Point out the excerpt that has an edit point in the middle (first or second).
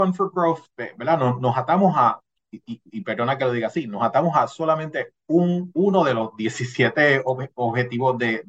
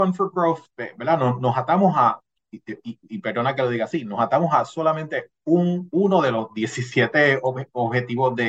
first